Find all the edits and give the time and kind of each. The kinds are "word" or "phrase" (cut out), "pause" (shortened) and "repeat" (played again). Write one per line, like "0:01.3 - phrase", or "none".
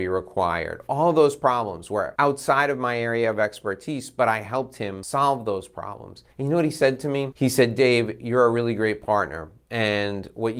0:06.3 - pause

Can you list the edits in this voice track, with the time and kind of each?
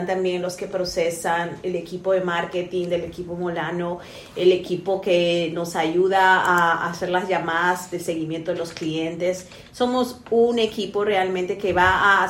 none

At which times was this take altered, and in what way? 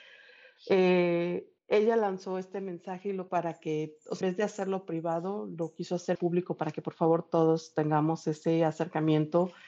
0:01.6 - pause
0:03.3 - word
0:04.2 - word
0:06.1 - word

